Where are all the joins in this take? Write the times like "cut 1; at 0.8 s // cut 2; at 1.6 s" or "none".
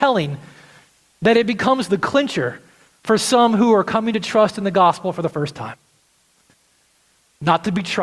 none